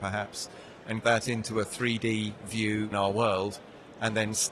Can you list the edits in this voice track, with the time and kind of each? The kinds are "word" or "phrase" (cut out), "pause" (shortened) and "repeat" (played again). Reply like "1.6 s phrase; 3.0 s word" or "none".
1.0 s word; 2.9 s word